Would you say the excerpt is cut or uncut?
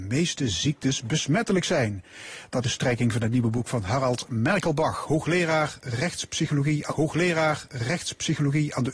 cut